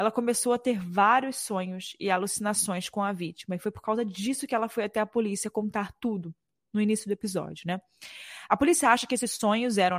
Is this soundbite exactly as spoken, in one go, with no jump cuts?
yes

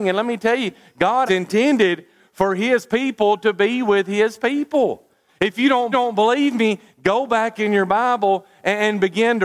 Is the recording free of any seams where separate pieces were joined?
no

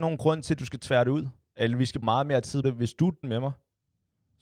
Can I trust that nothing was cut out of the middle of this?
no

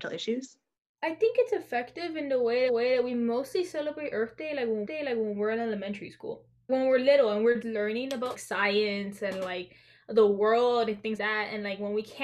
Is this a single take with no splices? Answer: no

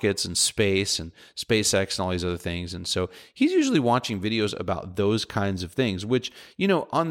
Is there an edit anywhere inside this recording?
no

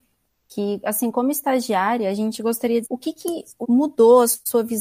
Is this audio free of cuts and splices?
no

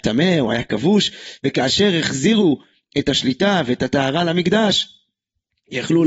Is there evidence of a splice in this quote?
no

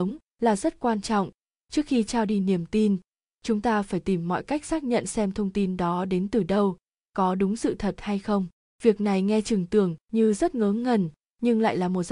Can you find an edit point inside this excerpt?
no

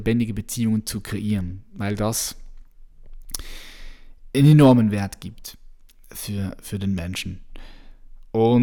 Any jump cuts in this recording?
no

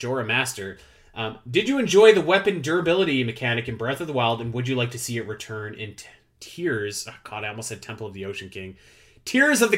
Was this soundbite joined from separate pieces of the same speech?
no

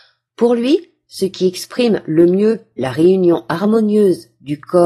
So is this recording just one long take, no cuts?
yes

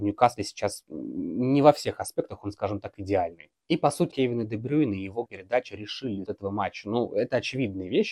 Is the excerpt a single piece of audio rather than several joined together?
no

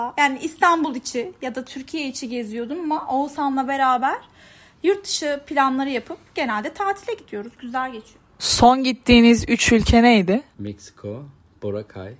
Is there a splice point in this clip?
no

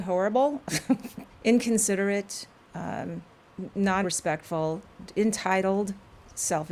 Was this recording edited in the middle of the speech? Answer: yes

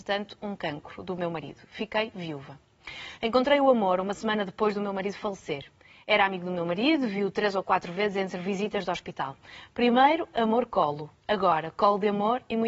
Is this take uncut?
yes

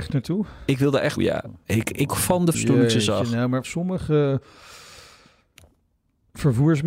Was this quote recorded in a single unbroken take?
no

